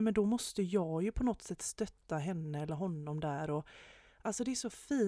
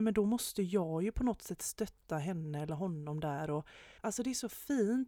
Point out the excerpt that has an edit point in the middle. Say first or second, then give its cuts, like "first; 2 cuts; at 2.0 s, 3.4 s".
second; 1 cut; at 4.0 s